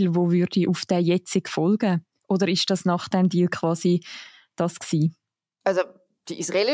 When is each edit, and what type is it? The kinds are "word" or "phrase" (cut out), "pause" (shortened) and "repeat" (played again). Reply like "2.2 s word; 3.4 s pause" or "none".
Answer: none